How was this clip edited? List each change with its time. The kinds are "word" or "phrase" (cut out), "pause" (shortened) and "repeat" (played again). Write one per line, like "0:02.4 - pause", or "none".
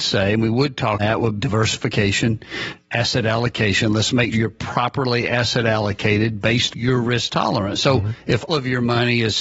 0:01.0 - word
0:01.4 - word
0:04.3 - word
0:06.7 - word
0:08.5 - word